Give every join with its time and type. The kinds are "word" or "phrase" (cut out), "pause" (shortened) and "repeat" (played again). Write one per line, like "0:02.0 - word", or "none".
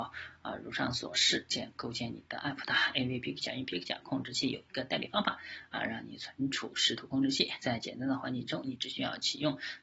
none